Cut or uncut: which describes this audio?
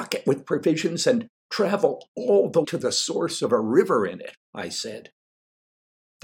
cut